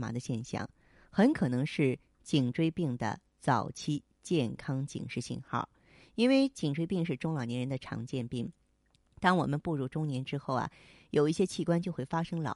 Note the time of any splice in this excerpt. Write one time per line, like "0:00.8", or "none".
none

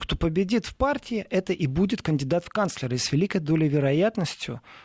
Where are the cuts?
none

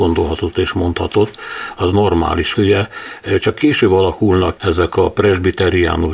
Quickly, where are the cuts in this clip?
0:02.5
0:04.6

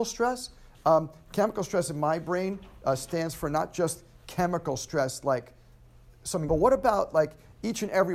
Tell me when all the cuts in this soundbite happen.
0:06.5

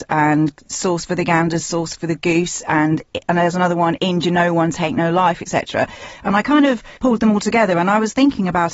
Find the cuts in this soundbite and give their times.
0:07.0

